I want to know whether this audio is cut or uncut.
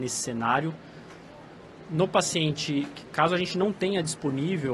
uncut